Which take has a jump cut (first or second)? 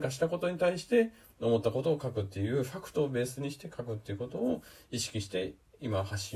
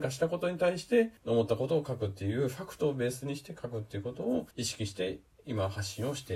second